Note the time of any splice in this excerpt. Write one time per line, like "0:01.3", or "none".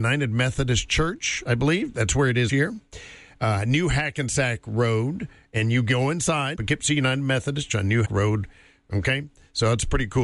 0:02.5
0:06.5
0:07.7
0:08.0